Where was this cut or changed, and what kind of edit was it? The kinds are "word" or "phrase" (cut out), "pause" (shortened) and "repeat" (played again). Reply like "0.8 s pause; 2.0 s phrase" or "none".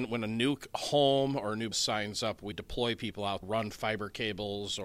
1.7 s word; 2.5 s word; 3.4 s phrase